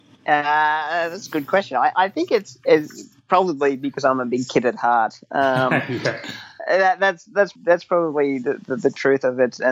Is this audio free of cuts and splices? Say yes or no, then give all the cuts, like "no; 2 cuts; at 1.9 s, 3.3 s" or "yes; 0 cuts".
no; 1 cut; at 7.6 s